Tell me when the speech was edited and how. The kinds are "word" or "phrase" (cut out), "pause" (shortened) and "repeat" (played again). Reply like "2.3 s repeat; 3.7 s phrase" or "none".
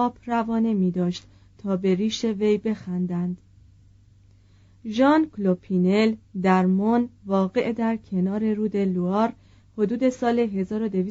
none